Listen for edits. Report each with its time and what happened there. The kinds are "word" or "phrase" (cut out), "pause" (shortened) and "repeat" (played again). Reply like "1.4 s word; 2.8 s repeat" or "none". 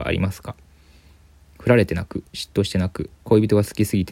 2.3 s pause; 3.2 s pause